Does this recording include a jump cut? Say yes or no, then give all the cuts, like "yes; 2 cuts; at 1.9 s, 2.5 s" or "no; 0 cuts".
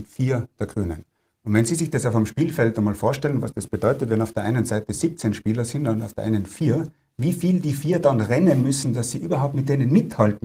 no; 0 cuts